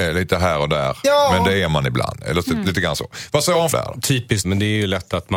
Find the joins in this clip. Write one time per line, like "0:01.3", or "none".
0:03.7
0:04.4